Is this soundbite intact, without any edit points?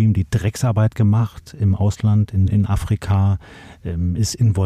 no; 1 cut; at 2.5 s

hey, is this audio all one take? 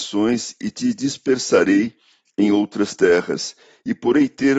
yes; 0 cuts

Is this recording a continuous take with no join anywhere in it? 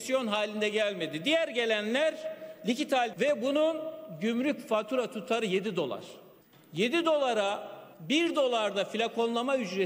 no; 3 cuts; at 3.1 s, 6.4 s, 7.9 s

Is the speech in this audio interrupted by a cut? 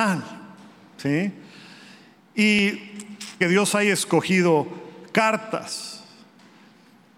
yes; 1 cut; at 3.4 s

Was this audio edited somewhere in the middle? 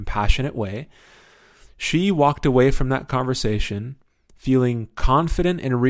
no; 0 cuts

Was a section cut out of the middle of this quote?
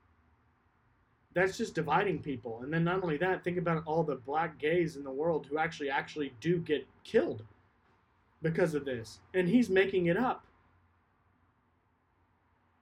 yes; 1 cut; at 7.8 s

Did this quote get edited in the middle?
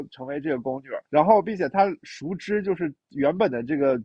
yes; 1 cut; at 1.0 s

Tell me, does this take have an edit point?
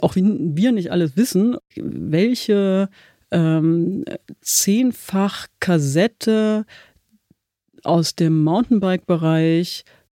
no; 0 cuts

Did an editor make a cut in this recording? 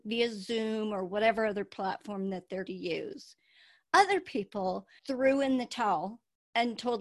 yes; 2 cuts; at 2.7 s, 5.0 s

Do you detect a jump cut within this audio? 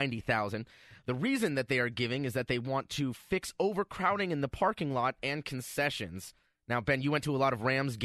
yes; 1 cut; at 6.4 s

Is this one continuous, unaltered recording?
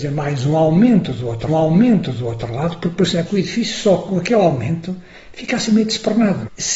no; 2 cuts; at 1.5 s, 3.3 s

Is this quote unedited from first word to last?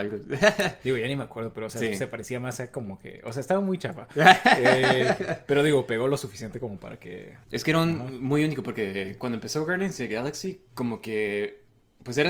no; 1 cut; at 7.4 s

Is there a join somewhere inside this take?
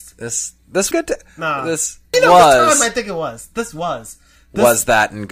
yes; 2 cuts; at 0.9 s, 2.1 s

